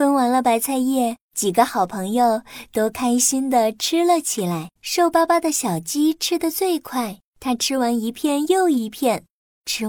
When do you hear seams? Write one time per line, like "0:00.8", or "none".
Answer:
0:01.2
0:04.8
0:07.3

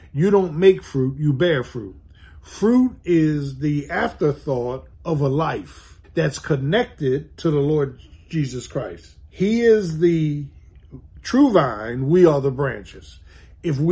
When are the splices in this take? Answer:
0:04.9
0:06.0
0:09.3

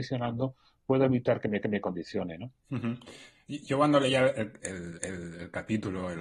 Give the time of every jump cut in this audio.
0:01.6
0:02.6
0:05.0

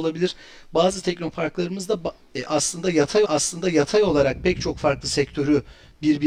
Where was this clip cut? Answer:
0:03.2

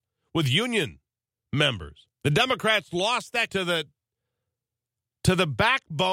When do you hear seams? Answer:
0:02.2
0:03.5

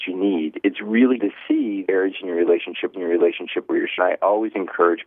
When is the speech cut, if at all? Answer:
0:01.2
0:01.9
0:02.9
0:04.0

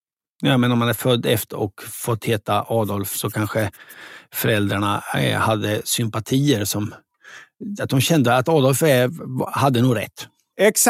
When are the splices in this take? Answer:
0:01.5

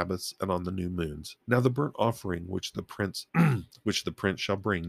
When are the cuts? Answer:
0:01.4
0:03.3

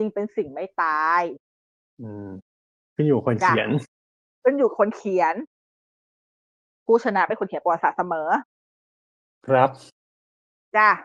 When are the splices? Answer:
none

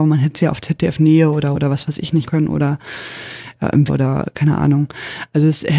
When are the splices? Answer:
0:01.5
0:02.3
0:03.9

